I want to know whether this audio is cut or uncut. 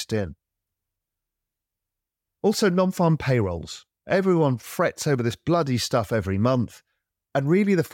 cut